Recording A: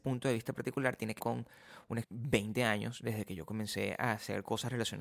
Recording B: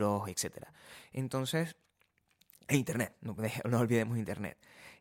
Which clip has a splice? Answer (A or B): A